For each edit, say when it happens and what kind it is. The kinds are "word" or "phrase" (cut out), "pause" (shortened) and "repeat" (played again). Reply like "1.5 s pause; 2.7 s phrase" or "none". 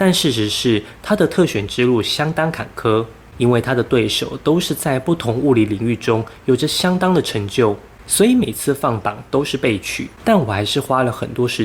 10.1 s pause